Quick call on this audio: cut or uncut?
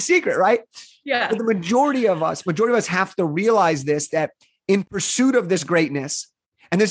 uncut